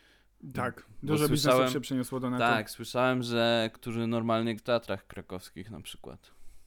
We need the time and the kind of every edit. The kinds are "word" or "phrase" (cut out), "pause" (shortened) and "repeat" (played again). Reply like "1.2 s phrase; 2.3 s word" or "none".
3.7 s phrase; 4.6 s word